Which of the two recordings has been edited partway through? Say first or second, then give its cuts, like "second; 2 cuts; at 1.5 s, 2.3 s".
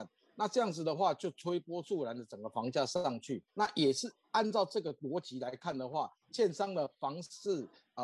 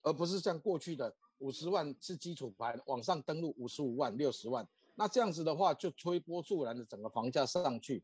first; 2 cuts; at 3.5 s, 6.2 s